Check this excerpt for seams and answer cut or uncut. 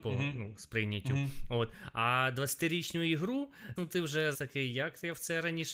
cut